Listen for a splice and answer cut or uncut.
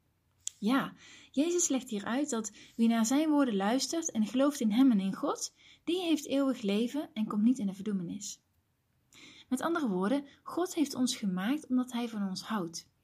uncut